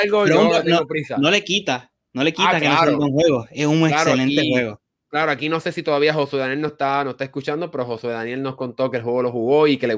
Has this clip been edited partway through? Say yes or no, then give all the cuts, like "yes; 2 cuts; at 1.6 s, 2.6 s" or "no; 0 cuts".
no; 0 cuts